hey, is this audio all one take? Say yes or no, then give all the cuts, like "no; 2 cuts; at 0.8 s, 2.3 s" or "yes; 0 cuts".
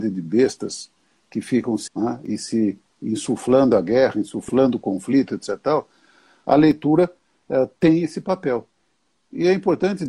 no; 1 cut; at 1.9 s